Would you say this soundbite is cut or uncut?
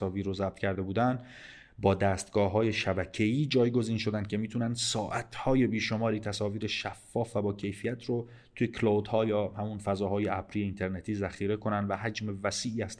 uncut